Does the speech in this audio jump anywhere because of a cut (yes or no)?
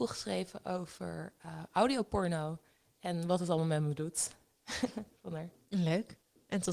no